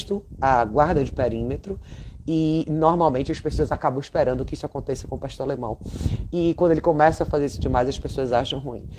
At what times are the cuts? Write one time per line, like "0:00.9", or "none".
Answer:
none